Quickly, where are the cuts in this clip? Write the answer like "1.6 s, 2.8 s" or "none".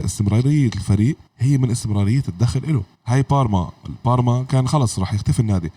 1.3 s, 2.9 s